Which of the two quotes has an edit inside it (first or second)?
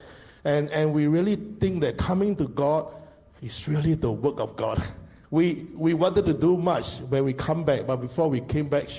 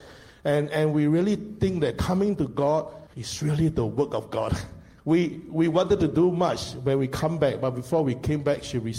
second